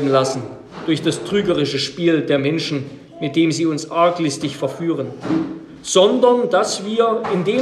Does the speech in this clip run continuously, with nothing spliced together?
yes; 0 cuts

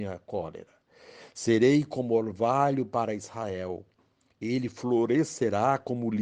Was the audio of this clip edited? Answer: no; 0 cuts

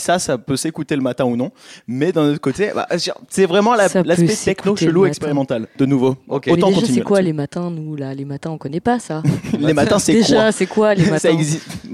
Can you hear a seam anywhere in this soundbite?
no; 0 cuts

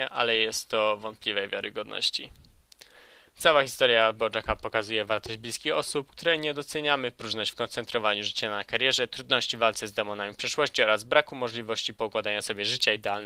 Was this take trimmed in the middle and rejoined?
no; 0 cuts

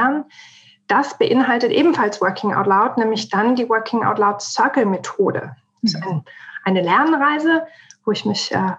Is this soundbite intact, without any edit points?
yes; 0 cuts

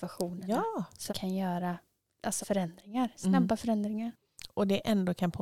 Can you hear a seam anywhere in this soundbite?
yes; 2 cuts; at 1.1 s, 2.4 s

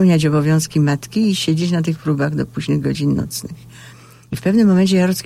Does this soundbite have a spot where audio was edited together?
no; 0 cuts

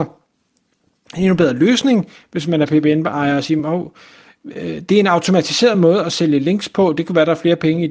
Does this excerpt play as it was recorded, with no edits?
yes; 0 cuts

